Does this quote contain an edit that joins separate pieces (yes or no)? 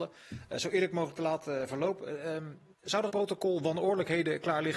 yes